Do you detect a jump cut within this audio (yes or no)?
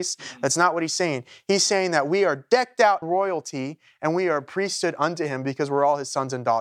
yes